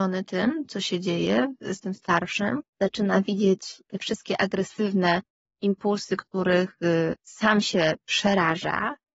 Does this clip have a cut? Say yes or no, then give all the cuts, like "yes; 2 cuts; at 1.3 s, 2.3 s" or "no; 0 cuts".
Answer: yes; 1 cut; at 2.7 s